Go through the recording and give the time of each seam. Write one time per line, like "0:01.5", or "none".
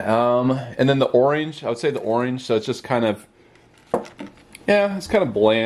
none

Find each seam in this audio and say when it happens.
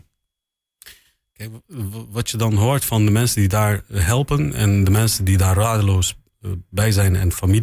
none

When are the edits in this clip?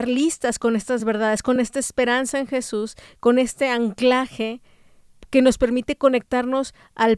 none

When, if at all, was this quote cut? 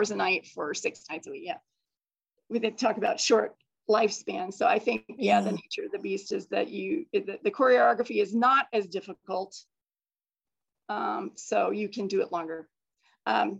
none

